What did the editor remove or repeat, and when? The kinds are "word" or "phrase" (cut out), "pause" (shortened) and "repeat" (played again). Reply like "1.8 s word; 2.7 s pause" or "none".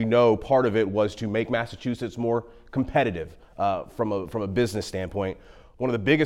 none